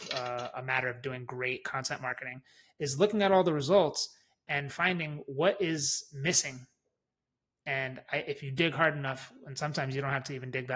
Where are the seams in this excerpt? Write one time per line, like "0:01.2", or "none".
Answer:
none

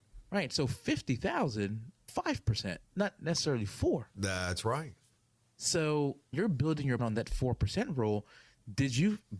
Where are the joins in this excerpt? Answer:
0:02.1
0:02.9
0:06.3
0:07.0

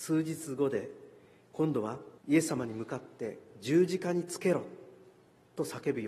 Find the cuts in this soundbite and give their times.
0:02.2

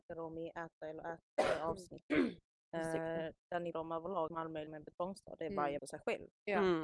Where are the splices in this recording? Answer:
0:03.7
0:04.3
0:04.7
0:05.8

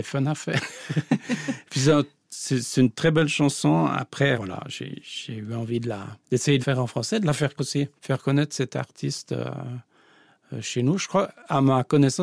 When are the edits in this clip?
0:04.3
0:06.2
0:06.6
0:07.6
0:08.0

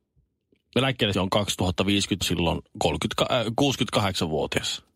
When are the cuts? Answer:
0:01.1
0:02.2

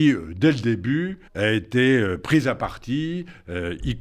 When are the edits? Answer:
0:01.3

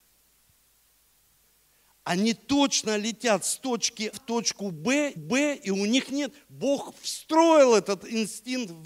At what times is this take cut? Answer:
0:04.1
0:05.2

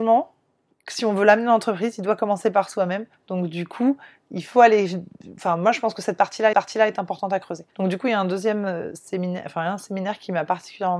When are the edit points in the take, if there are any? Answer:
0:06.5

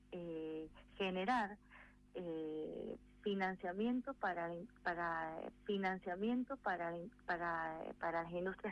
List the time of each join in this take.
0:05.5

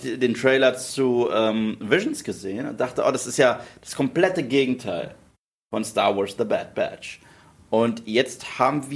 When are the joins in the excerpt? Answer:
none

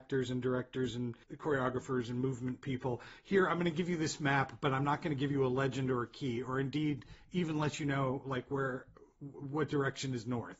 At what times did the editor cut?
0:01.2

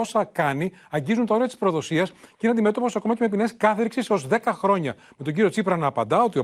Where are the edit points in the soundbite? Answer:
none

